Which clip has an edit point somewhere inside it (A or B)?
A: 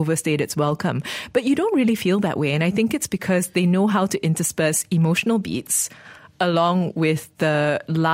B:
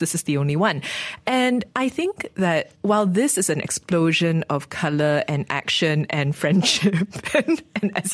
B